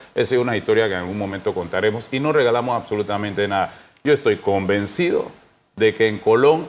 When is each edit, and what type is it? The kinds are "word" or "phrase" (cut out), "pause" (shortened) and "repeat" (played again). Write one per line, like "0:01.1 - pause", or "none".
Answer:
none